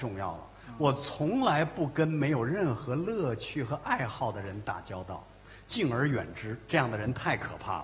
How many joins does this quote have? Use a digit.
0